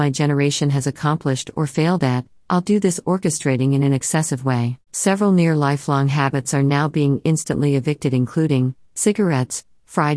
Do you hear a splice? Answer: yes; 1 cut; at 4.9 s

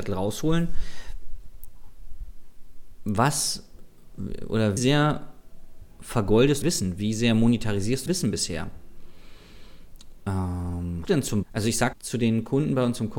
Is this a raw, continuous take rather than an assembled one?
no; 6 cuts; at 4.8 s, 6.6 s, 8.1 s, 11.0 s, 11.4 s, 11.9 s

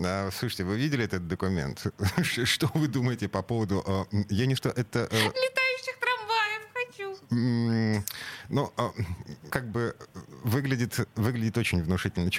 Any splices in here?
yes; 2 cuts; at 4.6 s, 9.5 s

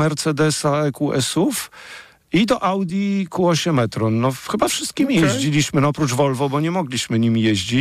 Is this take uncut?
yes; 0 cuts

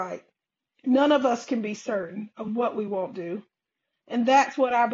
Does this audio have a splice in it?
no; 0 cuts

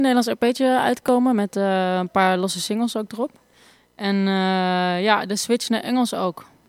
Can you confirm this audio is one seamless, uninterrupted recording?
yes; 0 cuts

